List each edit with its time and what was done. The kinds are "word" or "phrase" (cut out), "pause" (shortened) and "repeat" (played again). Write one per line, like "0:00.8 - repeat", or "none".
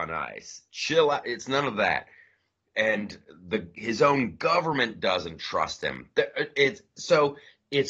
none